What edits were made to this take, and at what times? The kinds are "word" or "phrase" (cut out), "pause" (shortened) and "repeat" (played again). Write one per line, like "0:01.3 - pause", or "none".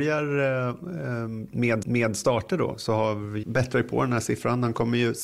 0:01.8 - repeat
0:03.4 - phrase